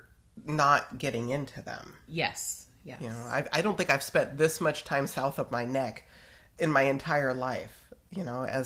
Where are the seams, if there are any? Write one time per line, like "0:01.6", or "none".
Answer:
0:06.5